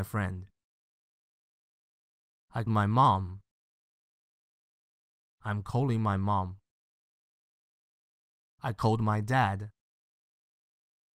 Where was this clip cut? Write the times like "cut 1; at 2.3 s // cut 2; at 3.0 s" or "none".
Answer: cut 1; at 2.7 s